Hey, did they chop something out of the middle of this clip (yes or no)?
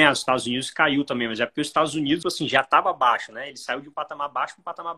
yes